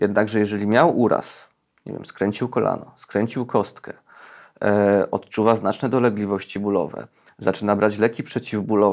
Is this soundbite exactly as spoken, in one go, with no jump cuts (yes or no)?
yes